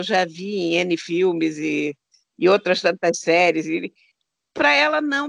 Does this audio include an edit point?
no; 0 cuts

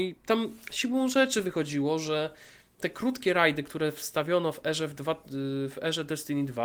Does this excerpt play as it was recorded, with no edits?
yes; 0 cuts

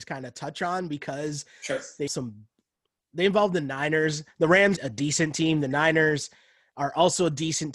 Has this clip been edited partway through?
yes; 3 cuts; at 2.1 s, 3.0 s, 4.8 s

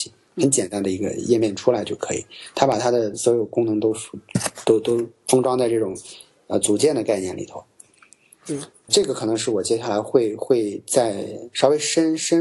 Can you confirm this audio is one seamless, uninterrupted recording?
no; 1 cut; at 8.9 s

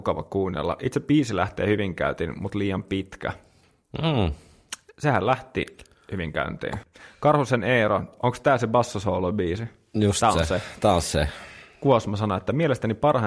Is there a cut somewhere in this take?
no; 0 cuts

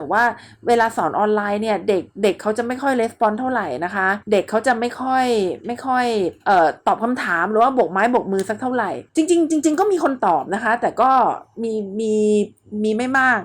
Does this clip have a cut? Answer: yes; 3 cuts; at 4.2 s, 6.4 s, 9.1 s

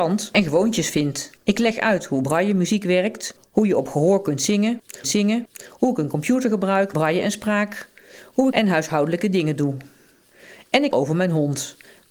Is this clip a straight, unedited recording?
no; 5 cuts; at 1.4 s, 5.0 s, 6.9 s, 8.5 s, 10.9 s

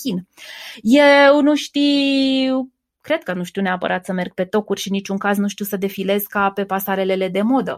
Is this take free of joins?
yes; 0 cuts

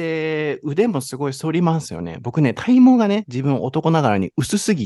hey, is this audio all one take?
yes; 0 cuts

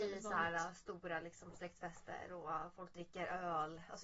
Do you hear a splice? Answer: no; 0 cuts

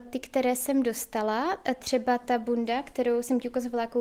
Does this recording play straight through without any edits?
yes; 0 cuts

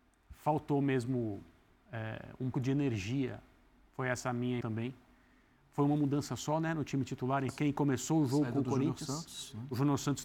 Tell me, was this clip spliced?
yes; 3 cuts; at 2.5 s, 4.6 s, 7.5 s

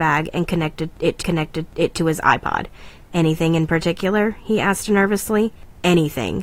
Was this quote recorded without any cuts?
no; 1 cut; at 1.2 s

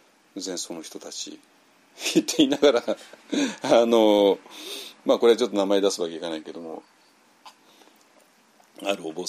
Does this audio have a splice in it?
yes; 1 cut; at 1.5 s

